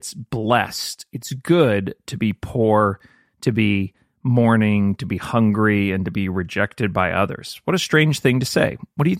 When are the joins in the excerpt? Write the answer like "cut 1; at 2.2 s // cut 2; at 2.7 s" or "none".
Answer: none